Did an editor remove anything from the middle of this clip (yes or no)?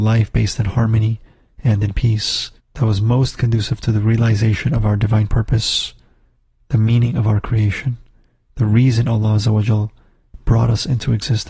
yes